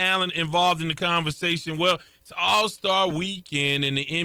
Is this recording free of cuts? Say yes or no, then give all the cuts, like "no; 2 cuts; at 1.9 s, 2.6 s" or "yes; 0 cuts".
yes; 0 cuts